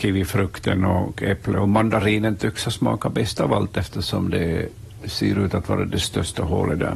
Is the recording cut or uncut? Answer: uncut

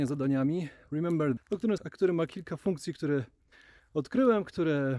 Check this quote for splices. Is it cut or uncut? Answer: cut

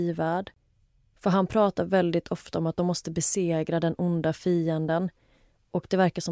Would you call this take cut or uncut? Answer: uncut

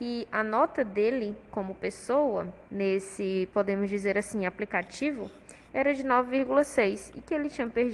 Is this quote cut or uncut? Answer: cut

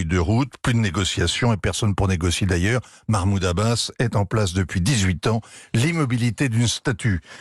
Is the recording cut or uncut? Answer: uncut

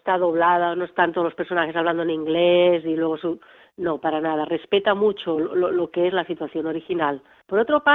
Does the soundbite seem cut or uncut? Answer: uncut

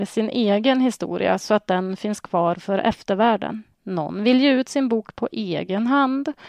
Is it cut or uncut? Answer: cut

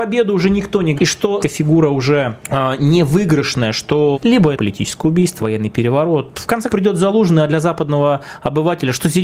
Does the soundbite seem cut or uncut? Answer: cut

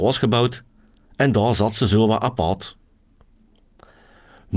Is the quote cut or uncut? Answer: uncut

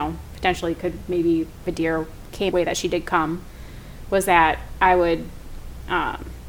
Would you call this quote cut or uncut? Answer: cut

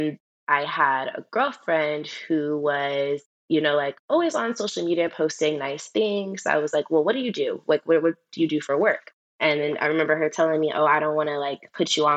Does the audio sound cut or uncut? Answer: uncut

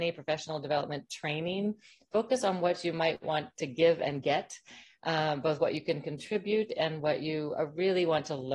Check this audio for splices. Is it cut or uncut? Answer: uncut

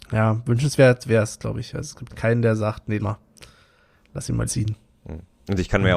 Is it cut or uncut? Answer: cut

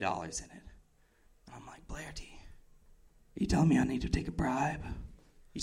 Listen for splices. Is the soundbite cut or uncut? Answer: cut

